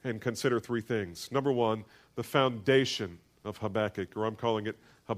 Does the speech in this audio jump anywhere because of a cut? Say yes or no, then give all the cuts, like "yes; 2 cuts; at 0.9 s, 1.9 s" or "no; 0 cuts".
no; 0 cuts